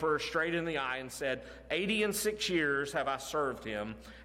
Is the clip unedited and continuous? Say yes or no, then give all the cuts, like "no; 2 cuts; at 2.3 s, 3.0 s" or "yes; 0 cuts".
yes; 0 cuts